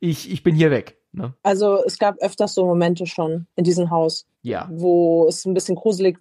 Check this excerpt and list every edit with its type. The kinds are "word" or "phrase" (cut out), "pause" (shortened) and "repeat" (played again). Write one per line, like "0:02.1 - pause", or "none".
0:01.4 - pause
0:03.5 - pause
0:04.3 - pause